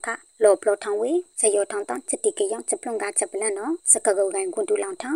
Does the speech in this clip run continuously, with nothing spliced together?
no; 1 cut; at 3.8 s

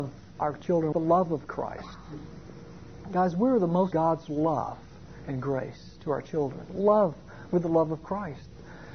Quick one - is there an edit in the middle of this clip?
yes; 2 cuts; at 0.9 s, 3.9 s

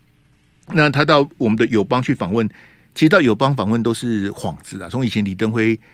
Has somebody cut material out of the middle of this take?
no; 0 cuts

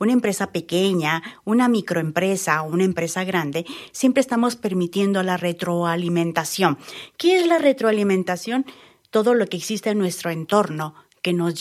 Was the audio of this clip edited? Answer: no; 0 cuts

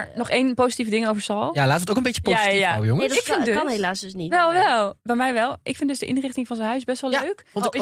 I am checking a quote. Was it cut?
yes; 1 cut; at 5.0 s

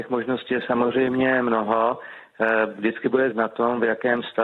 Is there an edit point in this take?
yes; 1 cut; at 3.3 s

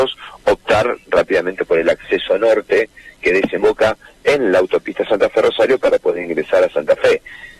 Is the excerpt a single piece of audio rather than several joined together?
yes; 0 cuts

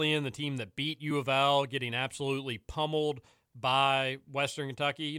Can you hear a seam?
no; 0 cuts

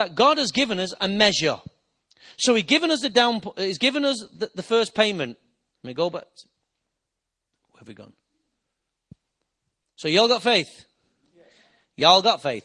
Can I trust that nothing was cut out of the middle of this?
yes; 0 cuts

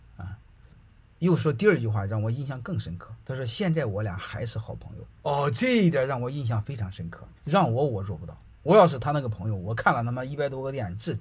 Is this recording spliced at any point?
yes; 3 cuts; at 3.2 s, 5.1 s, 7.4 s

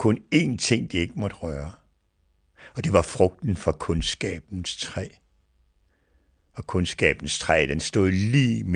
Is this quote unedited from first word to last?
yes; 0 cuts

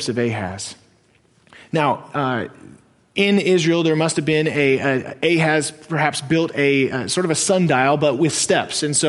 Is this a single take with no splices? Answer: yes; 0 cuts

